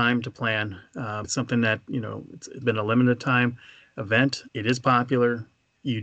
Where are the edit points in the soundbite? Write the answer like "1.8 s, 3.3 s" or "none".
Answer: 1.2 s, 2.6 s, 4.5 s